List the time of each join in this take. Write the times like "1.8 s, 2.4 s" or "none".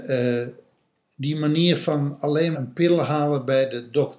2.5 s